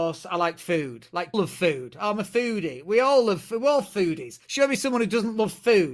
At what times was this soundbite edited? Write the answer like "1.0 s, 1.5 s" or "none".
1.3 s, 4.4 s